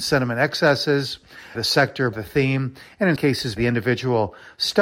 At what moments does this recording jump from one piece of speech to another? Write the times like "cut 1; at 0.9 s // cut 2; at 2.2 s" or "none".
cut 1; at 1.5 s // cut 2; at 2.1 s // cut 3; at 3.2 s // cut 4; at 3.6 s

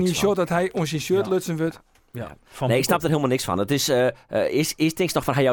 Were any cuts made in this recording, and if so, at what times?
none

